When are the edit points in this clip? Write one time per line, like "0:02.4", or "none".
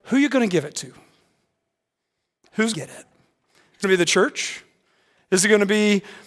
0:02.7
0:03.8